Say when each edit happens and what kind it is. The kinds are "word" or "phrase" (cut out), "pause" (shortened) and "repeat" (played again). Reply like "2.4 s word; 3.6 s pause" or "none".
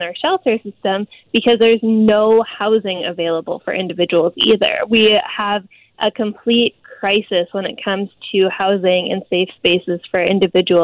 none